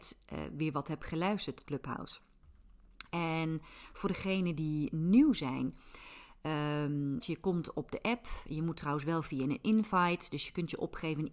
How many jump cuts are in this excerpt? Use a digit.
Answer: 2